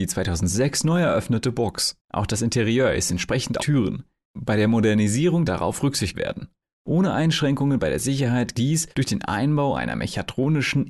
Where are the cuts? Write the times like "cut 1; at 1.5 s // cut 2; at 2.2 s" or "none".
cut 1; at 2.0 s // cut 2; at 3.6 s // cut 3; at 5.5 s // cut 4; at 6.1 s // cut 5; at 8.5 s // cut 6; at 8.9 s